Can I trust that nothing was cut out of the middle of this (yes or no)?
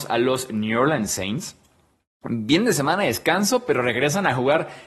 yes